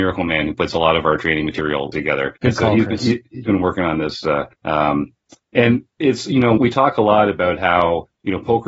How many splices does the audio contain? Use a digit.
5